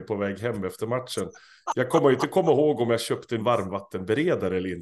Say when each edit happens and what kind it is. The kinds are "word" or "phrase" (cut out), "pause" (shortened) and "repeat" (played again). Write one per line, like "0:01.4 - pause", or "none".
0:03.4 - word